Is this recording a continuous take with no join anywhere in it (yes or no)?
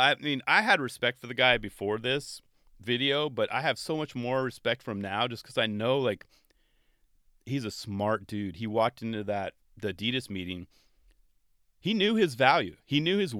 yes